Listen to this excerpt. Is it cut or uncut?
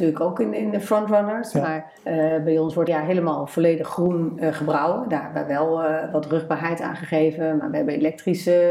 cut